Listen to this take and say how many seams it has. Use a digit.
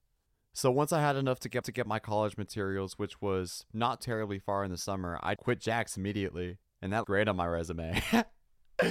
5